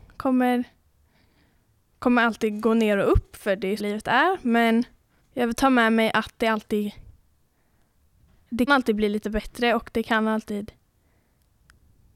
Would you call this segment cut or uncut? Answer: cut